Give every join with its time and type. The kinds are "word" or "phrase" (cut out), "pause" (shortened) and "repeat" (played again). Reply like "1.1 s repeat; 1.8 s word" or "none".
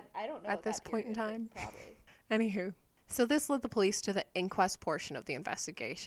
none